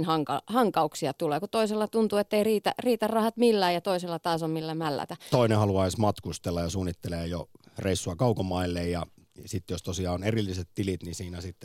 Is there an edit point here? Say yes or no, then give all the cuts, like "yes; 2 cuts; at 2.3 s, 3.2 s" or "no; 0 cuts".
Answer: no; 0 cuts